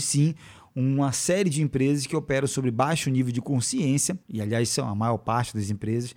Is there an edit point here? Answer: yes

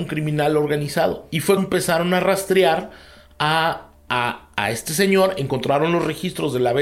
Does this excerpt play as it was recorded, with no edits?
no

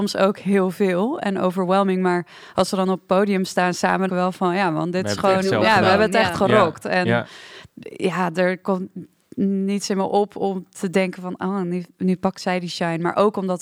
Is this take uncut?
no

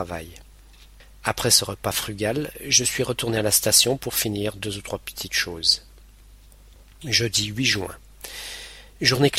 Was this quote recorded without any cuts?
yes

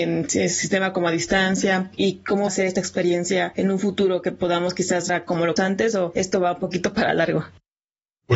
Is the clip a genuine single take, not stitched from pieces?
no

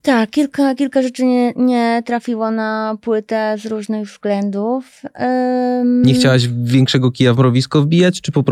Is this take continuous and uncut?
yes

